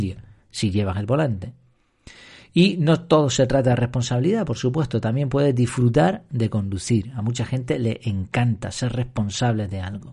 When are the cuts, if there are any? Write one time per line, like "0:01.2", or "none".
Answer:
none